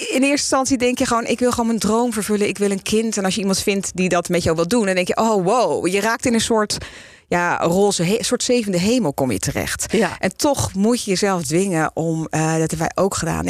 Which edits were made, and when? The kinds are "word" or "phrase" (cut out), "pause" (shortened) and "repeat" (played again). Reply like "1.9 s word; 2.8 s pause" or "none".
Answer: none